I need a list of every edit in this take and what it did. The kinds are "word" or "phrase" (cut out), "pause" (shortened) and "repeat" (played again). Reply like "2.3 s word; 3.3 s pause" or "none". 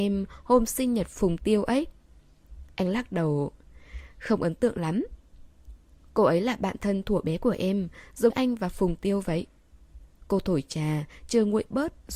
8.3 s word